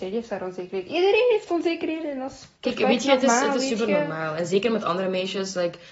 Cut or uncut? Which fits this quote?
cut